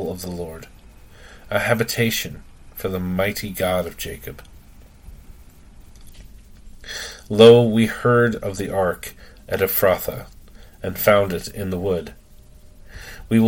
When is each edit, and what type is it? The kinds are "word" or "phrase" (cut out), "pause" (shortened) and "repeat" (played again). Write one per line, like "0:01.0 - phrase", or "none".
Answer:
none